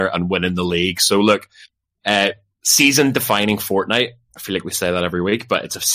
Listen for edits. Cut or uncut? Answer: uncut